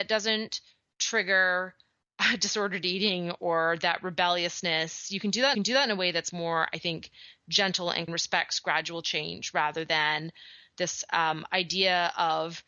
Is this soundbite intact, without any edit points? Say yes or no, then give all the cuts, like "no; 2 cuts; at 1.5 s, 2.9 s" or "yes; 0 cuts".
no; 3 cuts; at 5.5 s, 6.3 s, 8.1 s